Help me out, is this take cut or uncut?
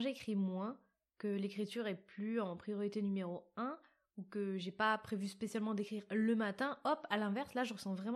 uncut